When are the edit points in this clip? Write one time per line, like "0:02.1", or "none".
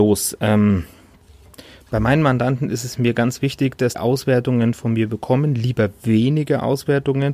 0:03.9